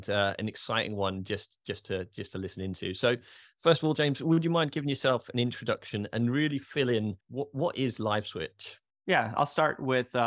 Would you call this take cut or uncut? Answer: cut